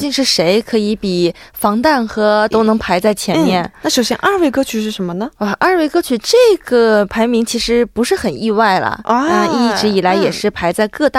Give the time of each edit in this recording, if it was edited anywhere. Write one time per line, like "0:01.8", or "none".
0:02.5